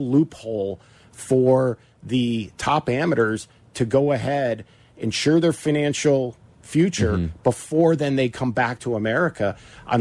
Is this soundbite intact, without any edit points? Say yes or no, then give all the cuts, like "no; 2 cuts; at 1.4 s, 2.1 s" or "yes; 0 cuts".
yes; 0 cuts